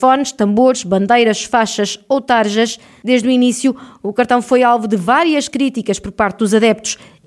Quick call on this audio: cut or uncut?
uncut